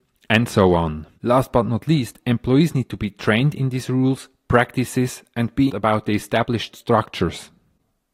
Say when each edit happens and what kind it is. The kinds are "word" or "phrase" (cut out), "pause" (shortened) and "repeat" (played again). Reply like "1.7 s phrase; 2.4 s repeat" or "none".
1.1 s pause; 5.7 s word

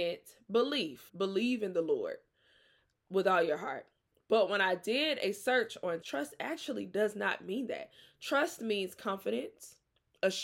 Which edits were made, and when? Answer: 1.1 s word; 6.0 s word

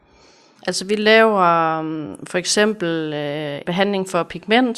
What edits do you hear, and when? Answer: 3.6 s word

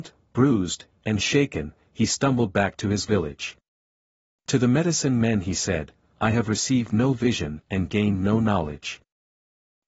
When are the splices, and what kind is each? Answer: none

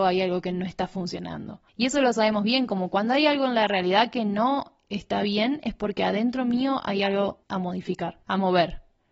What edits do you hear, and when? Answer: 1.7 s pause; 7.4 s pause; 8.2 s pause

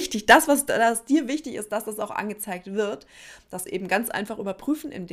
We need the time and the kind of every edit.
3.7 s word

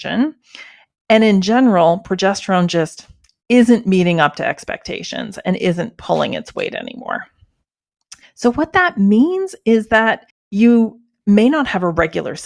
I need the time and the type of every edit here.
8.2 s pause; 10.3 s pause

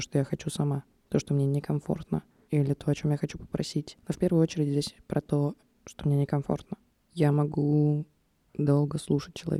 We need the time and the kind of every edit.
none

